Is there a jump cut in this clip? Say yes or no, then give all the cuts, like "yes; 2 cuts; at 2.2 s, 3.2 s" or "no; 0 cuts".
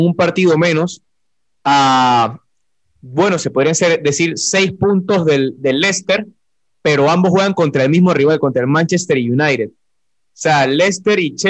no; 0 cuts